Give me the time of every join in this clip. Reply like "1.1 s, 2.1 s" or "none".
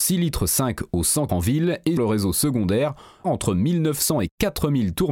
1.3 s, 2.0 s, 3.2 s